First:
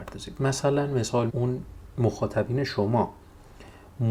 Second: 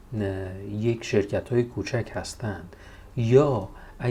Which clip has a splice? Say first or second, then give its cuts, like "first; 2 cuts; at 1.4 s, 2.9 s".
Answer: first; 1 cut; at 1.3 s